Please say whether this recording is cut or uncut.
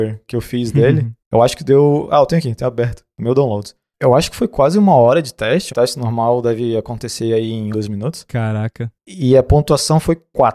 cut